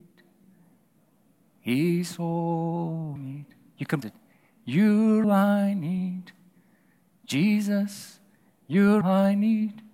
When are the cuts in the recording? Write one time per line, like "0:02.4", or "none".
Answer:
0:03.2
0:04.0
0:05.2
0:09.0